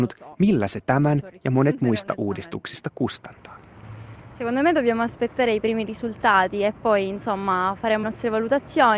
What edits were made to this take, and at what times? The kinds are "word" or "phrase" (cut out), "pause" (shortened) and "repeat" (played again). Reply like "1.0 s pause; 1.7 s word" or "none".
8.0 s word